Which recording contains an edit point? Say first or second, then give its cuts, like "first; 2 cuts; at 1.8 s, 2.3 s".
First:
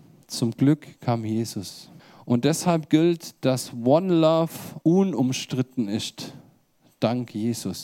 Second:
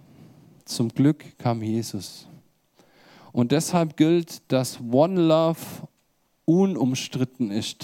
first; 2 cuts; at 2.0 s, 4.8 s